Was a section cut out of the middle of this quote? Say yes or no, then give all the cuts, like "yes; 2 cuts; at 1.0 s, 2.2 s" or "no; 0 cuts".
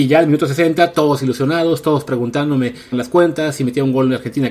yes; 1 cut; at 2.9 s